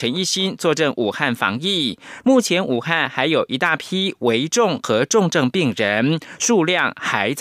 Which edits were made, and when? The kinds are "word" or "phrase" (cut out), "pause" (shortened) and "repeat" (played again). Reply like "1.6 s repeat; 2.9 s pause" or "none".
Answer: 2.2 s phrase